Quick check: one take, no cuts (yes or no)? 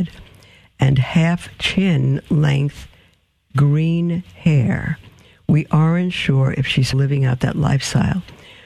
no